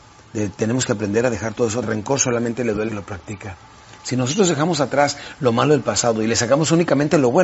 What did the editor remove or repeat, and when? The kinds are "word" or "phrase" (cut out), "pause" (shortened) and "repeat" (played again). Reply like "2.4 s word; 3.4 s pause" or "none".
1.8 s phrase; 2.9 s phrase